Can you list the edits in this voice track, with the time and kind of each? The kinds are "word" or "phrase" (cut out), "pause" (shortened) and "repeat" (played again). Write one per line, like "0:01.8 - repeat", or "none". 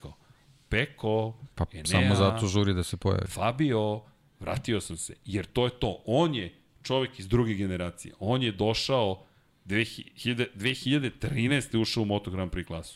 none